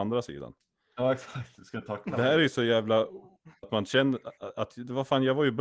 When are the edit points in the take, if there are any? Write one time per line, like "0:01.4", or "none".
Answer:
0:03.6